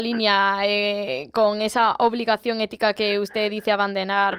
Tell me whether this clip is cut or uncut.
uncut